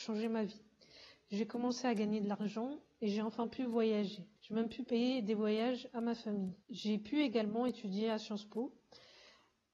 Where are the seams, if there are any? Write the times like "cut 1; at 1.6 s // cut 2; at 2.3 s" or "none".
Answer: cut 1; at 4.4 s // cut 2; at 6.6 s